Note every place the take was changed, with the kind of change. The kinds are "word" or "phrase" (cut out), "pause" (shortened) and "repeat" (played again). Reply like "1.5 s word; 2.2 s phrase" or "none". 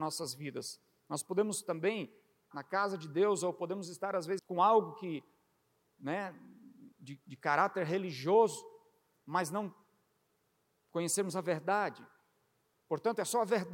2.5 s word; 4.4 s word; 6.9 s word